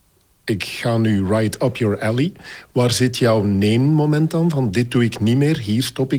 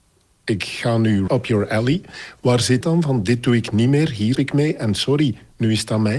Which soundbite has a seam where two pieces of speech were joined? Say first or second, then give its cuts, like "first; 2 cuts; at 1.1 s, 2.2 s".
second; 3 cuts; at 1.3 s, 2.8 s, 4.3 s